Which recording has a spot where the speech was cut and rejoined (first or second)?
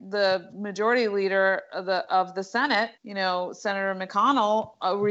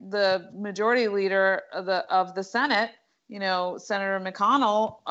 first